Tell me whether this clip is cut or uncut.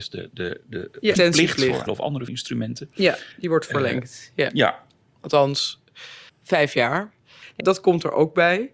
cut